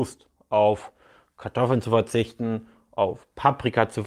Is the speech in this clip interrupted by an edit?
no; 0 cuts

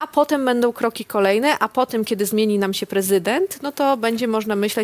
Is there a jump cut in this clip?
no; 0 cuts

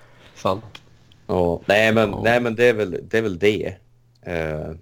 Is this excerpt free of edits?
yes; 0 cuts

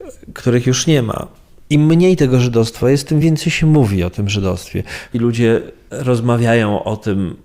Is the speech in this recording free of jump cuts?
yes; 0 cuts

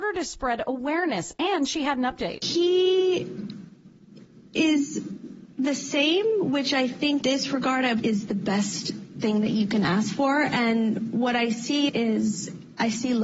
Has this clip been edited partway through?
yes; 3 cuts; at 7.2 s, 8.0 s, 11.9 s

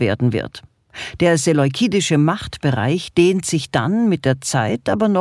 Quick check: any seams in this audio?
no; 0 cuts

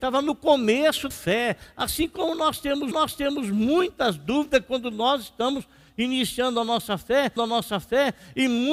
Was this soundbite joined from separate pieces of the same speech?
yes; 3 cuts; at 1.1 s, 2.9 s, 7.4 s

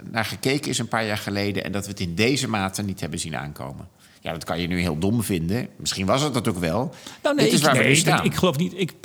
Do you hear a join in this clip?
yes; 1 cut; at 4.0 s

